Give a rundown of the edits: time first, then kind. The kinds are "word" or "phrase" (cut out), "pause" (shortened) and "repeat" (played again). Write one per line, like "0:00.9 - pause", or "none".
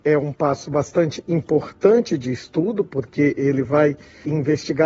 none